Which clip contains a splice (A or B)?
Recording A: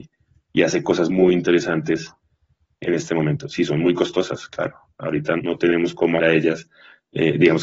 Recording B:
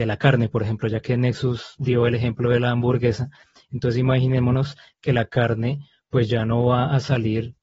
A